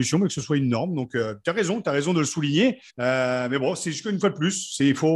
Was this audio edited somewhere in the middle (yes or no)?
yes